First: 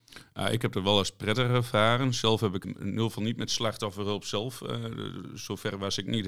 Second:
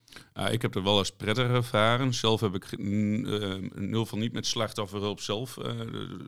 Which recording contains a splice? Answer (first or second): first